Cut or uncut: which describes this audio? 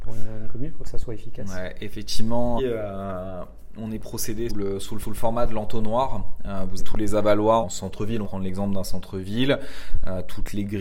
cut